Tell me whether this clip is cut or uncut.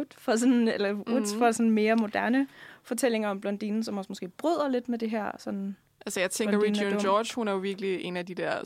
uncut